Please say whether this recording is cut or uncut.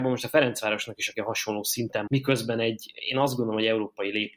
cut